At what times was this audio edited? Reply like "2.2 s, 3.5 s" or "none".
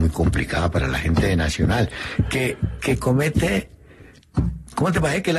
none